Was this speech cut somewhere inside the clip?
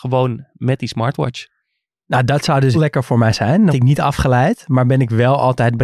yes; 2 cuts; at 2.7 s, 3.7 s

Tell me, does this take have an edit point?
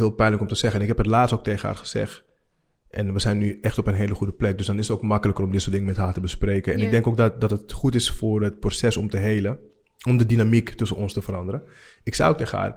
no; 0 cuts

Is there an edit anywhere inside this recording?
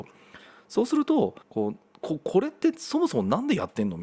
yes; 1 cut; at 1.4 s

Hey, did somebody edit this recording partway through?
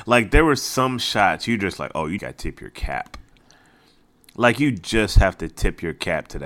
yes; 1 cut; at 2.2 s

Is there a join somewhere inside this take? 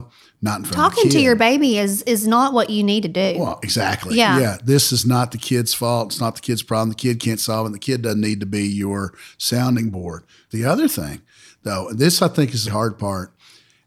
yes; 1 cut; at 12.7 s

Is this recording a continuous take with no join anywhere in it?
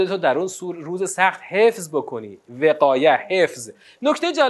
yes; 0 cuts

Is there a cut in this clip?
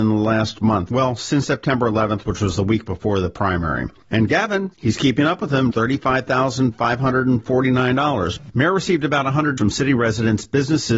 yes; 2 cuts; at 5.7 s, 9.6 s

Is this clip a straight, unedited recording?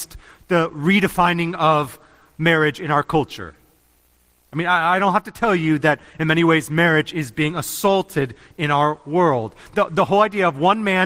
yes; 0 cuts

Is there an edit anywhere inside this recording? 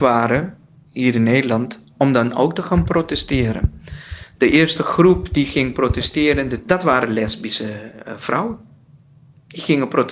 no; 0 cuts

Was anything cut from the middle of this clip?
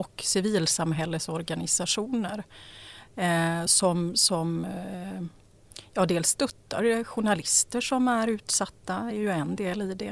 no; 0 cuts

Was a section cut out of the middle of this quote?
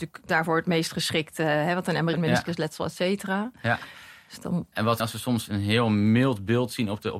yes; 2 cuts; at 2.1 s, 5.0 s

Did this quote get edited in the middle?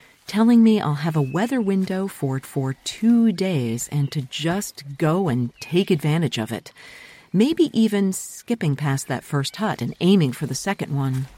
yes; 1 cut; at 2.4 s

